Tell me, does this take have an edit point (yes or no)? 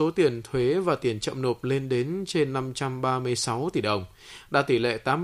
no